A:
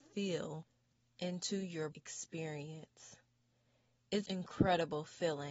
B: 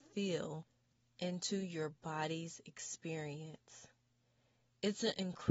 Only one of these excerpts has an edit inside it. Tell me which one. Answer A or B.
A